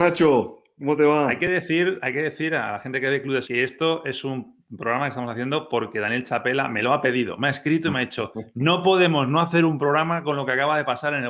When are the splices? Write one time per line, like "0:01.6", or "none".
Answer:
0:03.4